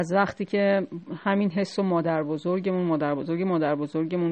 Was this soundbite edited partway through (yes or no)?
no